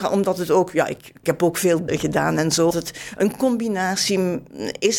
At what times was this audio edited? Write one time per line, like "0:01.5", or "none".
0:01.2
0:01.9
0:02.7